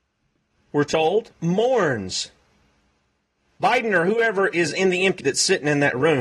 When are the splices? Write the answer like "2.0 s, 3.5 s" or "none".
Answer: 1.3 s, 5.2 s

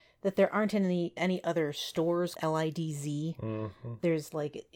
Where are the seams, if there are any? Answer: 1.2 s, 2.3 s

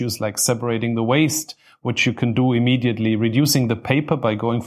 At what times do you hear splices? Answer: none

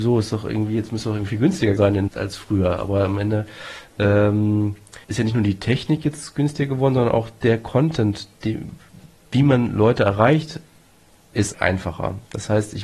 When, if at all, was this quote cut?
1.8 s, 2.1 s, 5.0 s, 11.5 s

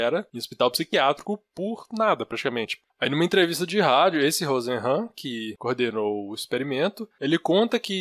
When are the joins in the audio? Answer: 2.9 s

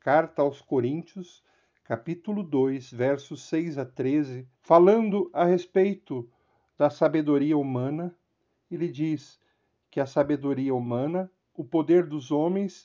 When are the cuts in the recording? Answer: 4.5 s

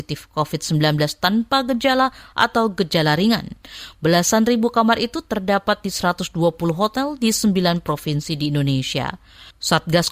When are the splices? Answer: none

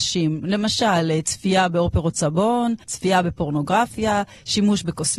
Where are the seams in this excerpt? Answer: 2.8 s

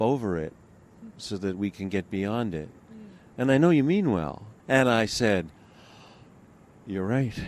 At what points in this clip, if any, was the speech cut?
4.6 s

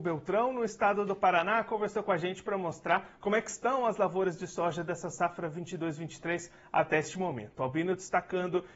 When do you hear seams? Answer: none

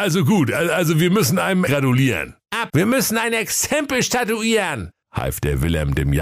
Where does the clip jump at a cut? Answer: 1.7 s, 2.7 s

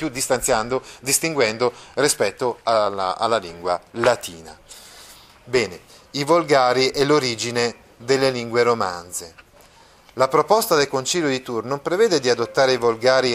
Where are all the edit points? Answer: none

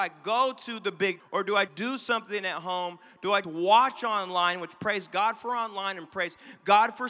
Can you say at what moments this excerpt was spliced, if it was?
1.2 s, 1.7 s, 3.4 s

